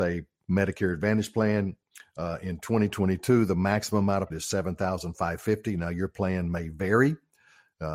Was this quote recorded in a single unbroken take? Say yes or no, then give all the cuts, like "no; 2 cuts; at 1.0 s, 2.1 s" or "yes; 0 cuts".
no; 1 cut; at 4.3 s